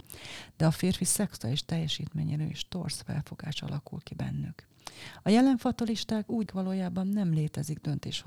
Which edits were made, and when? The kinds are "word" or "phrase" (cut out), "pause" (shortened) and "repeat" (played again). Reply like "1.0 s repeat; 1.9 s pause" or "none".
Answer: 6.5 s word